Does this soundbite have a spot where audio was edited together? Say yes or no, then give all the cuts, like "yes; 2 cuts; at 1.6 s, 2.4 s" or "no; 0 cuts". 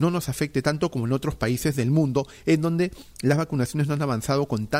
no; 0 cuts